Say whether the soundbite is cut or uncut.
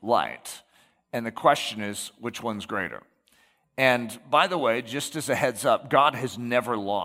uncut